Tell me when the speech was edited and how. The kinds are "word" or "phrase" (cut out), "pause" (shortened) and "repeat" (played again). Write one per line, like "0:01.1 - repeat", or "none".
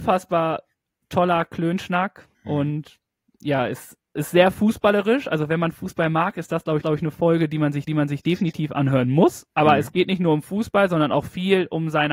0:02.3 - pause
0:06.8 - repeat
0:07.9 - repeat
0:09.5 - pause